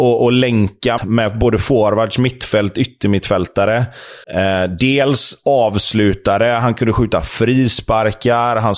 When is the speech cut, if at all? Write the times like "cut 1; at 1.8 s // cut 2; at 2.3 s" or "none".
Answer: cut 1; at 1.0 s // cut 2; at 4.2 s

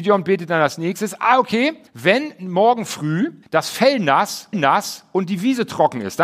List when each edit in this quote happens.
cut 1; at 1.9 s // cut 2; at 3.4 s // cut 3; at 4.5 s

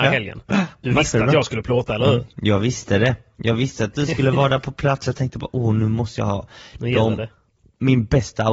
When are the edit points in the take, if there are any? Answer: none

